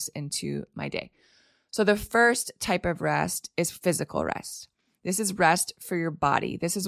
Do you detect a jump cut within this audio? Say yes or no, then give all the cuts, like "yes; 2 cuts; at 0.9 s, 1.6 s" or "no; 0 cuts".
no; 0 cuts